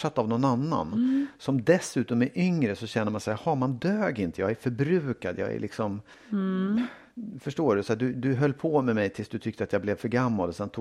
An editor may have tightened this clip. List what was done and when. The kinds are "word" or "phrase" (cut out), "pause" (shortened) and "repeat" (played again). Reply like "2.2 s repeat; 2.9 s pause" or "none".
6.1 s pause